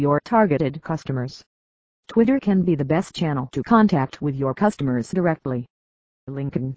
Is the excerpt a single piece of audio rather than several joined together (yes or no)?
yes